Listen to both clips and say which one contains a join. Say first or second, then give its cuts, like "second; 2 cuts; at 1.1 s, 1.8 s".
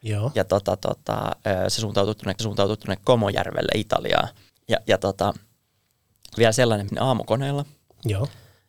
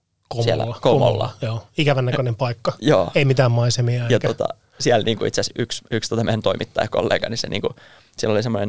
first; 5 cuts; at 2.4 s, 4.5 s, 5.0 s, 6.4 s, 6.9 s